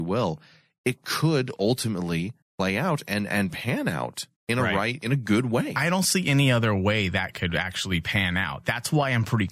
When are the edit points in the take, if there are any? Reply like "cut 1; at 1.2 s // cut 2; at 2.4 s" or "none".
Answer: cut 1; at 2.4 s // cut 2; at 4.4 s